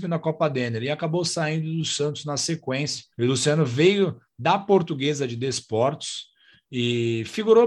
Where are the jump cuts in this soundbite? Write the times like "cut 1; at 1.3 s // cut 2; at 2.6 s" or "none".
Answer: cut 1; at 3.1 s